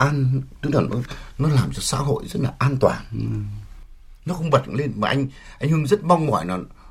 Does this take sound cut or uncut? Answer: uncut